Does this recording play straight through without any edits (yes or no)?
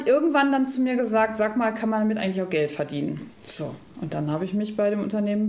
no